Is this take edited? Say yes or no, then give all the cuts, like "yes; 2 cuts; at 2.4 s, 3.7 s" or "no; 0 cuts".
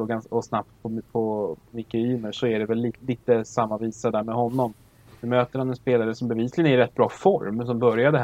no; 0 cuts